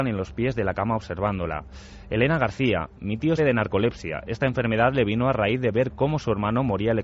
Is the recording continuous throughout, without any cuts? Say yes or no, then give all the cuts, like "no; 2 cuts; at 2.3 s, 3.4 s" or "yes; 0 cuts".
no; 1 cut; at 3.4 s